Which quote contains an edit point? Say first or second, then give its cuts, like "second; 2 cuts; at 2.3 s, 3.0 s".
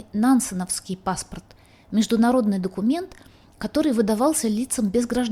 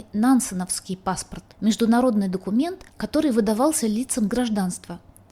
second; 3 cuts; at 1.5 s, 2.9 s, 4.3 s